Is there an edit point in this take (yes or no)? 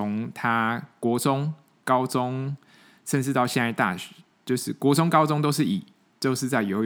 no